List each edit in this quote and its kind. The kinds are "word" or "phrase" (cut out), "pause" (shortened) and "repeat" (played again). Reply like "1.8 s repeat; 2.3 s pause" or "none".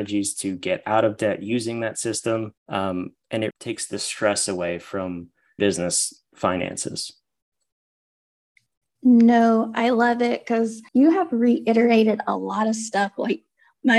2.6 s pause; 3.5 s word; 5.6 s phrase; 10.9 s pause